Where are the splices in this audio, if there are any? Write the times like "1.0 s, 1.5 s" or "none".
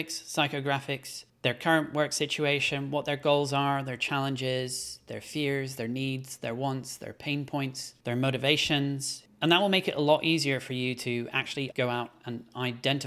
none